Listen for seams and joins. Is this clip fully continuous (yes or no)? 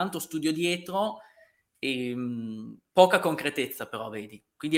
yes